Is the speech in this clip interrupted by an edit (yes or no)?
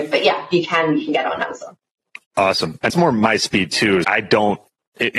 yes